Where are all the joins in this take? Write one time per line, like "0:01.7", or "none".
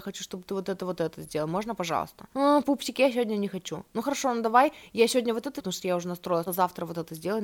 0:02.3
0:05.6
0:06.5